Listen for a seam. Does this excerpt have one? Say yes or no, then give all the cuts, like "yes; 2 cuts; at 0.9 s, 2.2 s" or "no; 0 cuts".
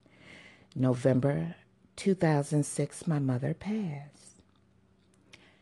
no; 0 cuts